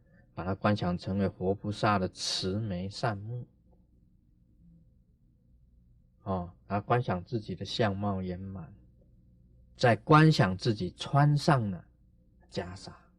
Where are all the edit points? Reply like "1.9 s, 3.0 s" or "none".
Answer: none